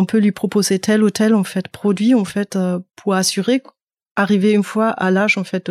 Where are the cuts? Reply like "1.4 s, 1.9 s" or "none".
none